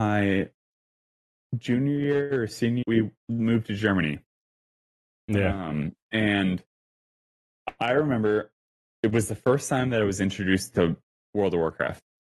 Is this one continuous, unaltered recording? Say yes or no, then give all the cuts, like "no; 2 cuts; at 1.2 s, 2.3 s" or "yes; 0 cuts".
no; 2 cuts; at 2.8 s, 3.2 s